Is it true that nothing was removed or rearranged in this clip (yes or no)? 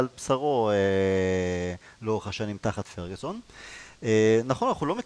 yes